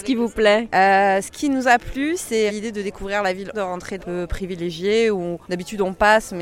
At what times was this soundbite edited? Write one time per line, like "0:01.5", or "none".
0:02.5
0:03.5
0:04.0
0:05.4